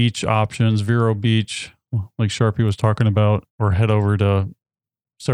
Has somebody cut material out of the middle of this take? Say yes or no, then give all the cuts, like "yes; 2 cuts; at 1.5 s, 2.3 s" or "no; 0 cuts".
yes; 1 cut; at 3.5 s